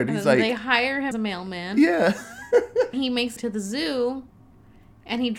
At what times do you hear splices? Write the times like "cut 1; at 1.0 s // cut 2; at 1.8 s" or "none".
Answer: cut 1; at 1.1 s // cut 2; at 2.9 s // cut 3; at 3.4 s

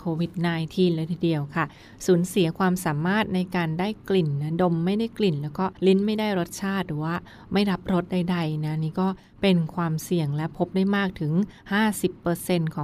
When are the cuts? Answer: cut 1; at 5.8 s

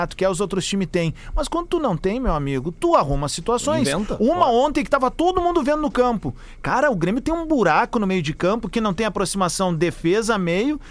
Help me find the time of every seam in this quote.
none

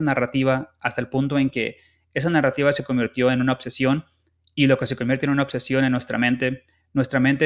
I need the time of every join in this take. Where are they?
none

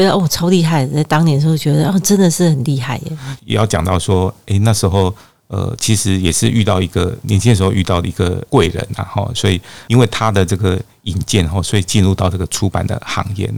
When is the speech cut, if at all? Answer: none

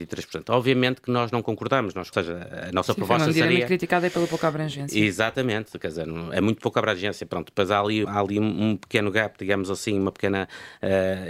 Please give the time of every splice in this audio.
cut 1; at 2.1 s // cut 2; at 8.0 s

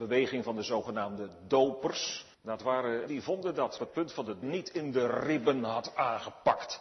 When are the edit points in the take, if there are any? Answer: cut 1; at 2.3 s // cut 2; at 3.1 s // cut 3; at 3.8 s // cut 4; at 4.4 s

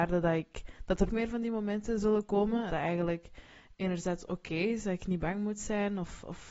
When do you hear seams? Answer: cut 1; at 1.1 s // cut 2; at 2.7 s

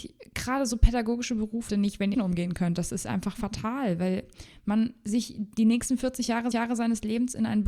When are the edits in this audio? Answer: cut 1; at 1.7 s // cut 2; at 2.1 s // cut 3; at 6.5 s

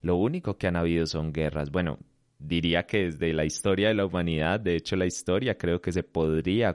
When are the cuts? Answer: none

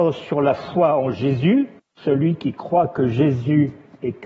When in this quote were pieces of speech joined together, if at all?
cut 1; at 1.8 s

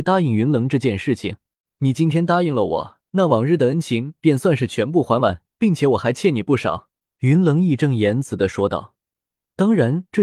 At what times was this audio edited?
cut 1; at 1.6 s // cut 2; at 3.1 s // cut 3; at 5.5 s // cut 4; at 7.0 s

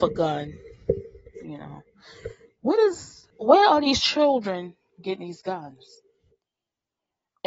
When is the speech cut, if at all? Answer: cut 1; at 3.3 s

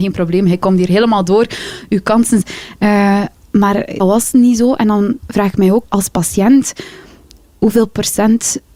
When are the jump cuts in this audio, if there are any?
cut 1; at 2.4 s // cut 2; at 4.0 s // cut 3; at 5.8 s

